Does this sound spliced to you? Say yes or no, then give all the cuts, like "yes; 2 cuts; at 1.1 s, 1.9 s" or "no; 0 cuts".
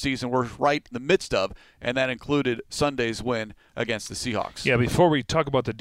yes; 1 cut; at 0.9 s